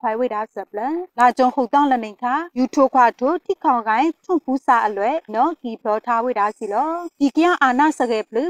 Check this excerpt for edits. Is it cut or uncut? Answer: cut